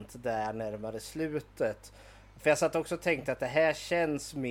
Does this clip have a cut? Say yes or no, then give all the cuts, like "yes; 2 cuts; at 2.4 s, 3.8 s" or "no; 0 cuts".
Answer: no; 0 cuts